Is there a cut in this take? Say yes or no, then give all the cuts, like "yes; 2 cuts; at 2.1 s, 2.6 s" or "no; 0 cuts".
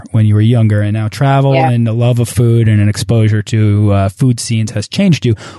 no; 0 cuts